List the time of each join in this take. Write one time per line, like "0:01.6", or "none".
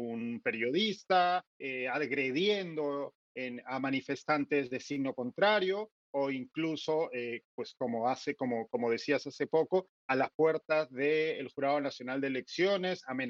0:01.5